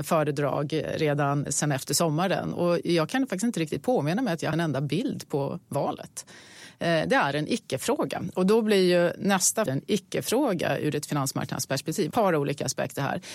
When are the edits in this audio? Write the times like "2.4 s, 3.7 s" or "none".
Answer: 1.5 s, 4.5 s, 9.7 s, 12.1 s